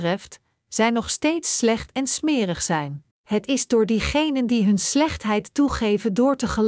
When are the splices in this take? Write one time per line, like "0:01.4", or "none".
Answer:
0:03.1